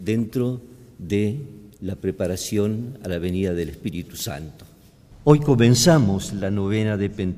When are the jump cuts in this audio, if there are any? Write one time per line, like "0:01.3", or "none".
0:01.7